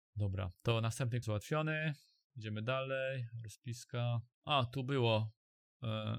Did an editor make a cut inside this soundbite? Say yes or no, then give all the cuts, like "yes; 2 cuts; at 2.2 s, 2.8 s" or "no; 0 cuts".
yes; 2 cuts; at 1.2 s, 4.3 s